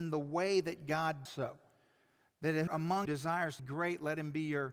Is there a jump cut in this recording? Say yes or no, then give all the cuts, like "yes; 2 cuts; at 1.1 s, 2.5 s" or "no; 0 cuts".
yes; 4 cuts; at 1.3 s, 2.7 s, 3.1 s, 3.6 s